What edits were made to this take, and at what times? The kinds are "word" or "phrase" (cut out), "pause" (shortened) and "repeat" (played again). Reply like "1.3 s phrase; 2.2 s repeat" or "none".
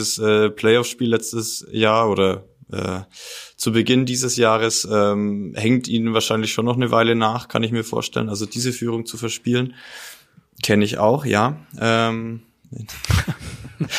none